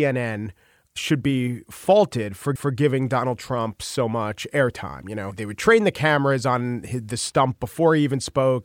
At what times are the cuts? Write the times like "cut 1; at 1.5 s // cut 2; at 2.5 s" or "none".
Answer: cut 1; at 2.6 s